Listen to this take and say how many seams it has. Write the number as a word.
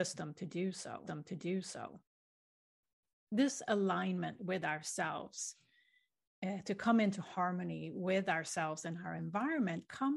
zero